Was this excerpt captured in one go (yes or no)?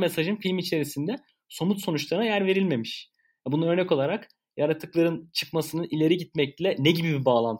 yes